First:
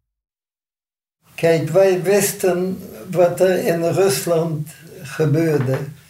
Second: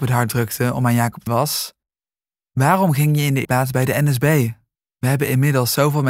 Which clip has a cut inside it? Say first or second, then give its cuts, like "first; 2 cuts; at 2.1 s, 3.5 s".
second; 3 cuts; at 1.3 s, 3.4 s, 4.7 s